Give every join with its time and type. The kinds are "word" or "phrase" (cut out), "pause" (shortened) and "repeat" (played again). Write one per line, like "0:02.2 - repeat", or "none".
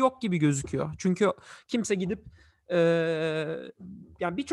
none